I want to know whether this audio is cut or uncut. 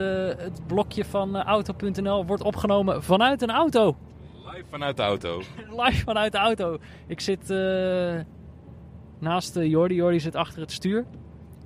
uncut